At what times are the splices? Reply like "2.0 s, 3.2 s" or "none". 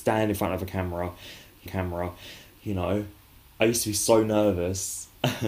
1.7 s